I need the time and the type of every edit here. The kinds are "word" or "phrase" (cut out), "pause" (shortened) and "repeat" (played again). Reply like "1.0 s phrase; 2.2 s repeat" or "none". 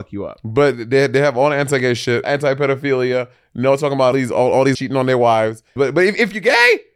2.2 s word; 4.1 s word; 4.7 s word; 5.8 s word